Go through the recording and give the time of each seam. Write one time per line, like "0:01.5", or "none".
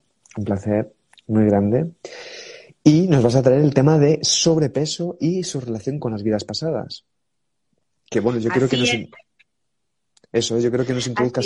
none